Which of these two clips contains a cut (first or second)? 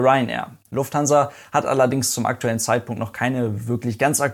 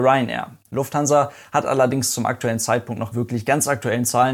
second